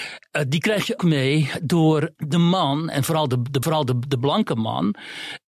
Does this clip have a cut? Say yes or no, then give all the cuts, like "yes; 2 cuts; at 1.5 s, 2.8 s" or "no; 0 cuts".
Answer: yes; 3 cuts; at 1.0 s, 2.2 s, 3.6 s